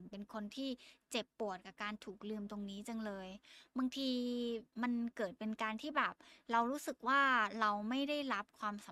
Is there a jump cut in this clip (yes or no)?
yes